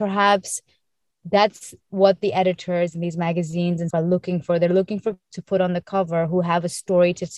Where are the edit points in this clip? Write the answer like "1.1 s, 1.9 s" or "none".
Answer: 3.9 s, 5.3 s